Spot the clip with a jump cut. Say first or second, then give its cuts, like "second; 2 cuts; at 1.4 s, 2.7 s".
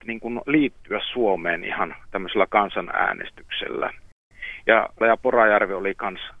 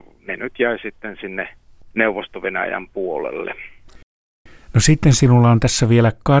first; 1 cut; at 5.0 s